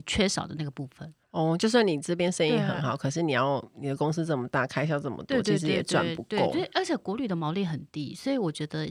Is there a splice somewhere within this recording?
yes; 1 cut; at 1.2 s

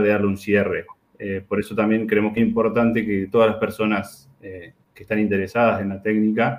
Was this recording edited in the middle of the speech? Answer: yes; 1 cut; at 2.4 s

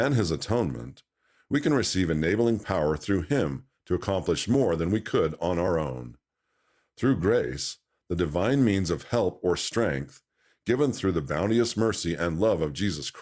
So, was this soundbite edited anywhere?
no; 0 cuts

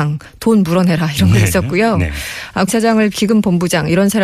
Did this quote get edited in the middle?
yes; 2 cuts; at 2.7 s, 3.1 s

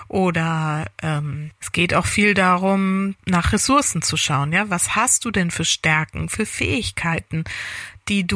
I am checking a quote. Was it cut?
yes; 2 cuts; at 1.6 s, 3.2 s

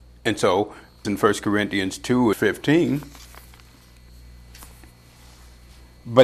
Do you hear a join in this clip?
yes; 2 cuts; at 1.0 s, 2.3 s

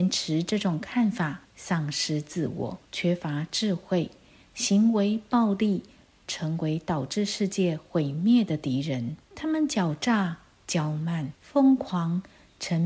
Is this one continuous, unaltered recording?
no; 4 cuts; at 1.4 s, 2.9 s, 9.2 s, 11.3 s

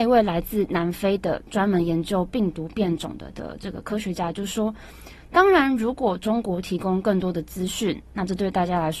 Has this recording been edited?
yes; 1 cut; at 3.3 s

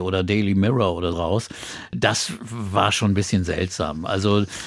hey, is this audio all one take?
no; 1 cut; at 1.1 s

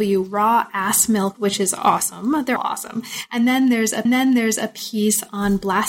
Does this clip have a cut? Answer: yes; 3 cuts; at 1.3 s, 2.6 s, 4.1 s

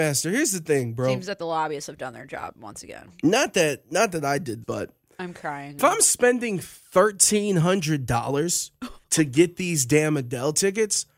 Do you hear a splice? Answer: yes; 3 cuts; at 4.6 s, 5.8 s, 9.0 s

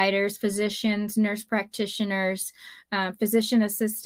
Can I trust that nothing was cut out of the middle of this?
yes; 0 cuts

